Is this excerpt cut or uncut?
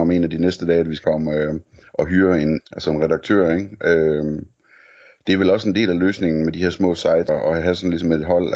cut